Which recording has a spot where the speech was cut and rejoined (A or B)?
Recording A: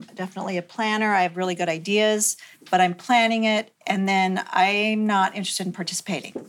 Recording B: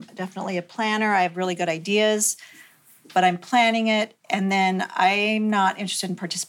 A